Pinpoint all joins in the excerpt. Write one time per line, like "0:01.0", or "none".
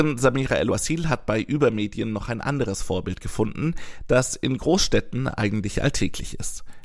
none